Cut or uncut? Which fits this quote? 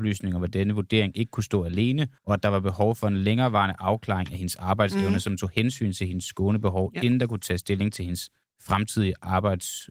cut